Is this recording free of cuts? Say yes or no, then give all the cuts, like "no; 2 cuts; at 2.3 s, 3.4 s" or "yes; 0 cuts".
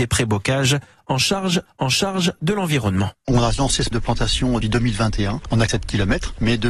no; 4 cuts; at 1.7 s, 3.9 s, 4.6 s, 5.7 s